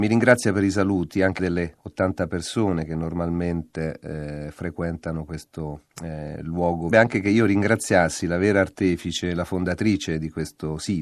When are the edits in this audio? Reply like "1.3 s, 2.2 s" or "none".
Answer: 1.4 s, 6.9 s